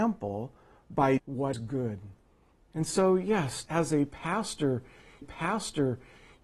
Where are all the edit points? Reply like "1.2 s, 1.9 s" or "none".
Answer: 1.2 s, 1.5 s, 2.5 s, 3.7 s, 5.2 s